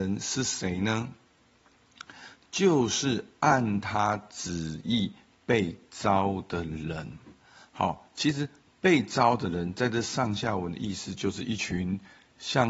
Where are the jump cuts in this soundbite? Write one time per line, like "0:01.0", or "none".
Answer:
none

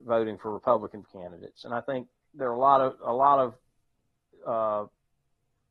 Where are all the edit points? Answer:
0:01.0
0:02.2

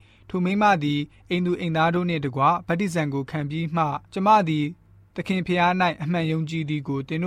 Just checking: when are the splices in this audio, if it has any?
0:04.0

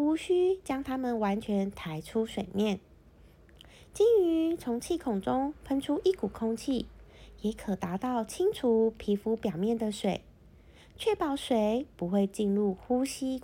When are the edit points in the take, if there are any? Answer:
none

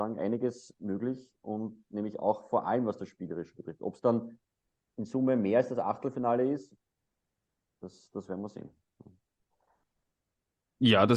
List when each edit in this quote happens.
none

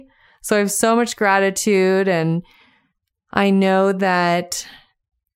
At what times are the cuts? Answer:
none

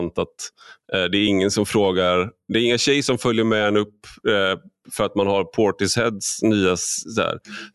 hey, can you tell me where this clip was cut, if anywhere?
none

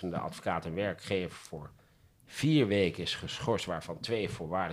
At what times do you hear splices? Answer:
none

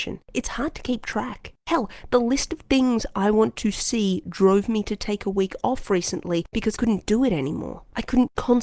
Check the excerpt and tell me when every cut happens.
0:06.8

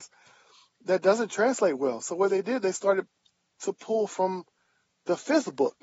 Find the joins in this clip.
none

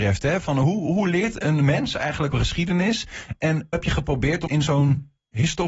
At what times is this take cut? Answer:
0:01.4
0:02.3
0:03.7
0:04.5

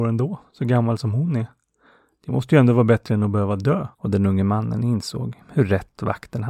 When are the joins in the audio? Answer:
0:03.9

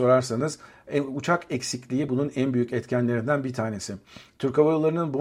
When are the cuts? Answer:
none

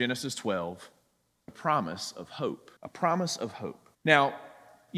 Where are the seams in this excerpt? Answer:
0:01.5
0:02.8
0:03.9

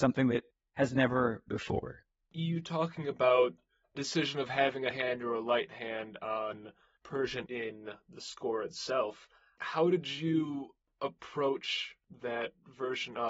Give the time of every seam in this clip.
0:01.5
0:03.9
0:04.9
0:07.5

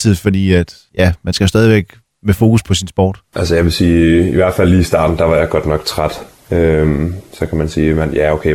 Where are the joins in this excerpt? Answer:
none

